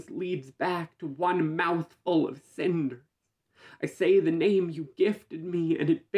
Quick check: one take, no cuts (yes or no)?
yes